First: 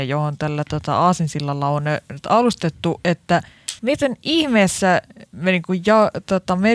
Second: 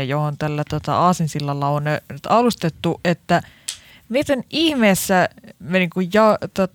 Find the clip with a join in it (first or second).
first